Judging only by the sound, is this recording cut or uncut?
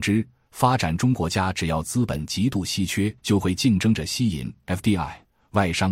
cut